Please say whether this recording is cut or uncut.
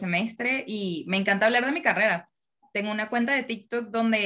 uncut